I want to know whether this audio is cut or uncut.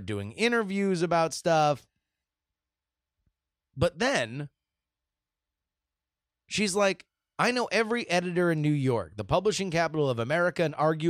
uncut